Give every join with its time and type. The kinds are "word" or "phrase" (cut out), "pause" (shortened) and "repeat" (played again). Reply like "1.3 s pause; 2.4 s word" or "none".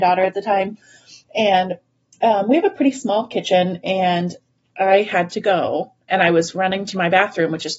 none